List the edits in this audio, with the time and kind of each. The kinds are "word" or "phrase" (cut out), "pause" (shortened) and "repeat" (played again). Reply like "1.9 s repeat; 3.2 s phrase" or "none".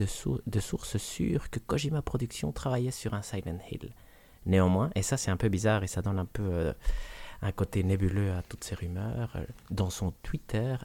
9.6 s pause